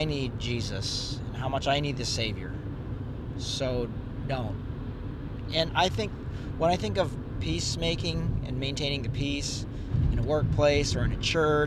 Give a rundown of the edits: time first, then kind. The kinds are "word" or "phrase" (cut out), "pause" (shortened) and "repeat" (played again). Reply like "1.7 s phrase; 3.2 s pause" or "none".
5.7 s word